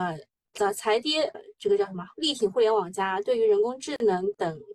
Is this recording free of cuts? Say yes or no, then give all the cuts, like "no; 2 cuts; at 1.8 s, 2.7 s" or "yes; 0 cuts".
no; 1 cut; at 1.3 s